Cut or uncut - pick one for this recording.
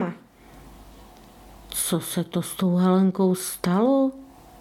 uncut